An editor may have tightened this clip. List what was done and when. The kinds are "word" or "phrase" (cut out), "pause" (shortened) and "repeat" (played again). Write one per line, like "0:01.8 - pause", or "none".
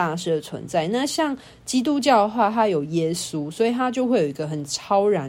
none